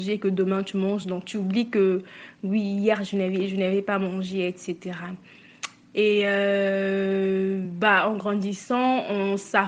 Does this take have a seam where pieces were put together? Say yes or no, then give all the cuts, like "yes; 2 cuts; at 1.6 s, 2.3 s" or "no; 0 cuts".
no; 0 cuts